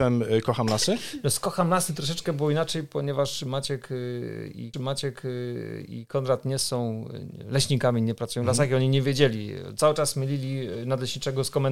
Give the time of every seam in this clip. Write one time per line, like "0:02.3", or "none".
0:04.7